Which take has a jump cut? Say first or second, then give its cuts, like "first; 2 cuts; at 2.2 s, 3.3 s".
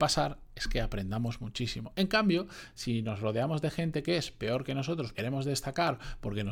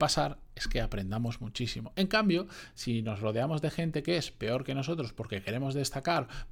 first; 1 cut; at 5.1 s